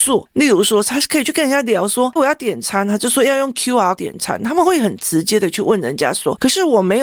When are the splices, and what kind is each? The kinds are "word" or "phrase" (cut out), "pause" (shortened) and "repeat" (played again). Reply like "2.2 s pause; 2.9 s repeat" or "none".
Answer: 2.2 s word; 4.0 s word